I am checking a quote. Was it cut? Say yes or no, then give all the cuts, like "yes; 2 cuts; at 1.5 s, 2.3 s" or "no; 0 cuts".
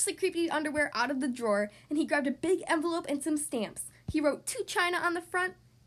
no; 0 cuts